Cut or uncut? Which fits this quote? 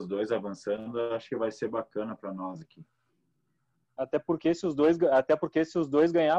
uncut